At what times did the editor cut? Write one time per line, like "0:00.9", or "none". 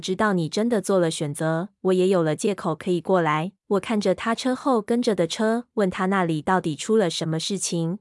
0:03.6